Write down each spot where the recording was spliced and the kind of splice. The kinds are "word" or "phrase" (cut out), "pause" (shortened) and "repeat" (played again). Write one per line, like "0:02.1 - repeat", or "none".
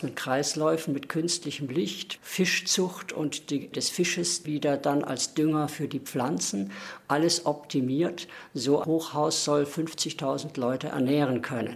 0:02.2 - word
0:03.7 - word
0:04.4 - word
0:08.8 - word